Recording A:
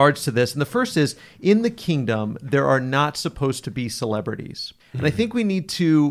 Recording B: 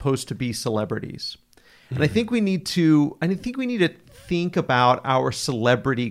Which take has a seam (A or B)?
A